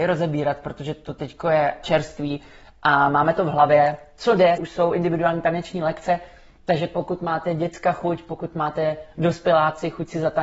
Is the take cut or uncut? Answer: cut